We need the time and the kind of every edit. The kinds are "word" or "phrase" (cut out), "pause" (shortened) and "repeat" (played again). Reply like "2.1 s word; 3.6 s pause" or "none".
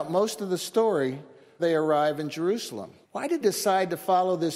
1.6 s word; 3.0 s pause; 3.4 s word